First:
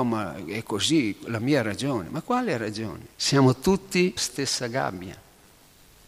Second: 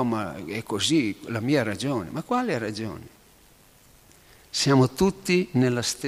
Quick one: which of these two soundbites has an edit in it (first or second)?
first